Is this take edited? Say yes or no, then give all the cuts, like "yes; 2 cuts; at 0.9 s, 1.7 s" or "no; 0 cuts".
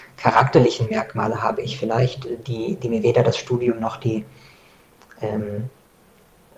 no; 0 cuts